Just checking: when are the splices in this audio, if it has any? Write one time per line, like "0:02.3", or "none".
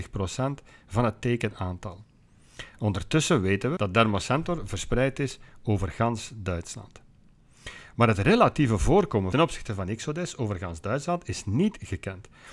0:03.8
0:09.3